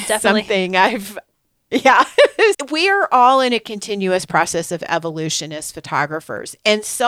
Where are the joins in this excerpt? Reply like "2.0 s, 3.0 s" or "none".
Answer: 2.5 s